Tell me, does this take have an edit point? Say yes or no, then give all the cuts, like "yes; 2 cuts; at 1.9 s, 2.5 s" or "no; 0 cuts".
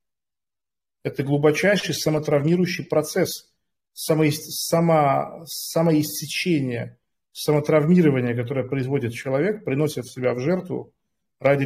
no; 0 cuts